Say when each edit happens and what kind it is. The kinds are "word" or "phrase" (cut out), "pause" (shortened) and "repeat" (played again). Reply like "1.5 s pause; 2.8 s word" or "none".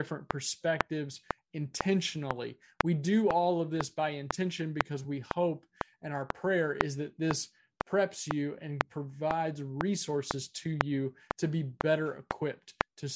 none